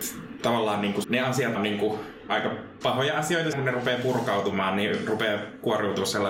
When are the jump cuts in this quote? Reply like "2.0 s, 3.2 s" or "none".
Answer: 1.0 s, 1.5 s, 2.3 s, 2.8 s, 3.5 s